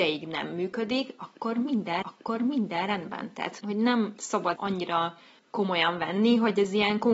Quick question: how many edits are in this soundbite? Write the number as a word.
four